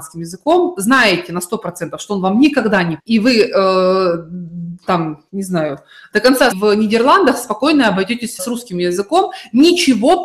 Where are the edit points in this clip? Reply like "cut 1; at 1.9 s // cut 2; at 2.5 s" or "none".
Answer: cut 1; at 3.0 s // cut 2; at 5.3 s // cut 3; at 6.5 s // cut 4; at 8.4 s